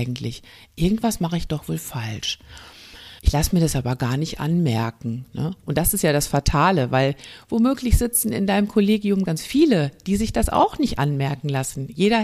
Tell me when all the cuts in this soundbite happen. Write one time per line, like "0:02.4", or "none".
0:03.2
0:09.3